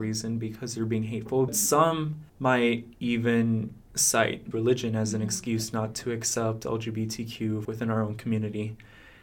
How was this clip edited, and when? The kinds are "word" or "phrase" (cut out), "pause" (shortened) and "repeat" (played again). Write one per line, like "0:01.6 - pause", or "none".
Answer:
0:01.5 - word
0:02.3 - pause
0:03.8 - pause
0:04.5 - phrase
0:07.6 - word